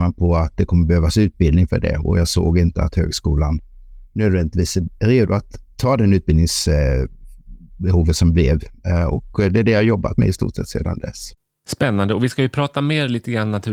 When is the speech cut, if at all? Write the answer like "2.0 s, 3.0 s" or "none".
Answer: none